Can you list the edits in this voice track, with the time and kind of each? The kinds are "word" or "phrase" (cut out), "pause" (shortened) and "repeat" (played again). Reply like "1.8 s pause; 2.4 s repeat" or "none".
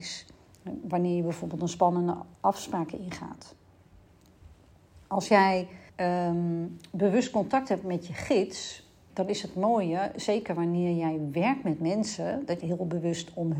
2.3 s pause; 5.9 s pause; 9.1 s word; 12.6 s phrase